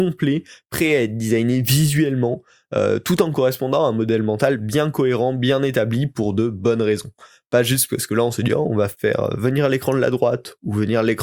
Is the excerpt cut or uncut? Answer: uncut